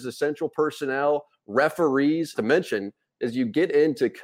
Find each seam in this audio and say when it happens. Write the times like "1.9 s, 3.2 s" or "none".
2.3 s